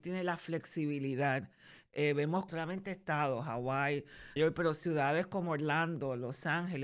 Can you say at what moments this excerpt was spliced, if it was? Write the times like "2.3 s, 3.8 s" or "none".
2.5 s, 4.4 s